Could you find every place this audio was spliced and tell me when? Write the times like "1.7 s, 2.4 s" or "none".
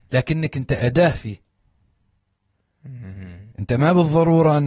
3.5 s